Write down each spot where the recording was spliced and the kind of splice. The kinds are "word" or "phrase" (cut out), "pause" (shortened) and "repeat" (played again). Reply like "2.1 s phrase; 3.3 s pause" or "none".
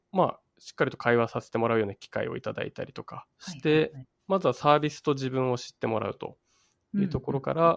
3.3 s pause